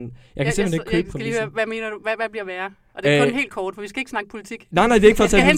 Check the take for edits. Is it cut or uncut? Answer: uncut